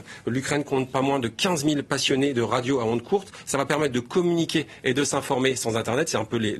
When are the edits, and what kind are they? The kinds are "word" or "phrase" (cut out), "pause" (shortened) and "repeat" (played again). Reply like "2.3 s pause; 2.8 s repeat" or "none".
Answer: none

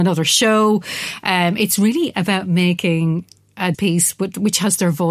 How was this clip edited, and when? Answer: 3.7 s word

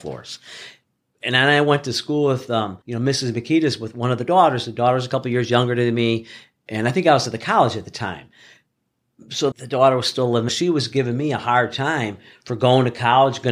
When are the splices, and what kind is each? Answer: 2.8 s pause; 9.5 s word; 10.5 s phrase

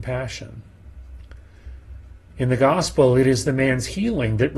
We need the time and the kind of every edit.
none

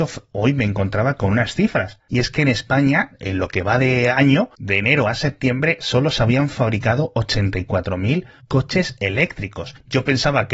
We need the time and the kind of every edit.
none

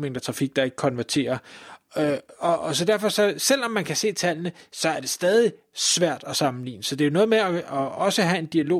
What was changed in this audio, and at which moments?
none

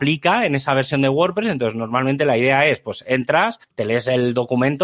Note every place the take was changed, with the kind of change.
3.6 s pause

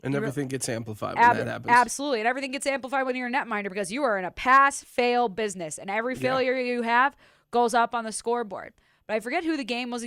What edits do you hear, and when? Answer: none

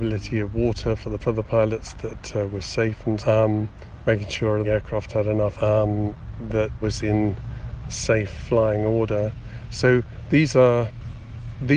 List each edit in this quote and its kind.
1.2 s phrase; 3.2 s word; 4.6 s word; 5.5 s word; 6.8 s phrase; 7.8 s word

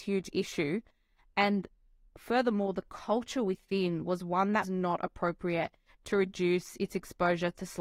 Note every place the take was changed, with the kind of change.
4.6 s word

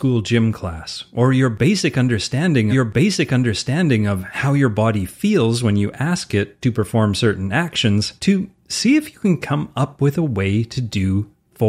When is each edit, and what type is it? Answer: 2.7 s repeat; 8.2 s pause

